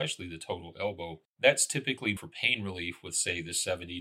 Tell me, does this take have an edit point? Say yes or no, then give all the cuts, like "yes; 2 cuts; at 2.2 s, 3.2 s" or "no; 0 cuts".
yes; 2 cuts; at 1.3 s, 2.2 s